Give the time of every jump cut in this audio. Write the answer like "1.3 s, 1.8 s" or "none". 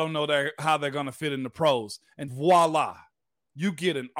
2.3 s